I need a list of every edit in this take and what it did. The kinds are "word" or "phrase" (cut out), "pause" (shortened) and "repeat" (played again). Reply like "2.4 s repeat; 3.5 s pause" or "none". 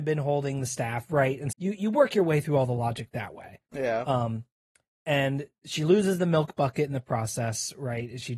1.5 s word